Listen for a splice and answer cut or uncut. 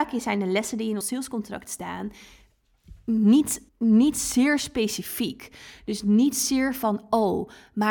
cut